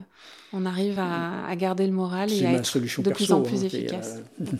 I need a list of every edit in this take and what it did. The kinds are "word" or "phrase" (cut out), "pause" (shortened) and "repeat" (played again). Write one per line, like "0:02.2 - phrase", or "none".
none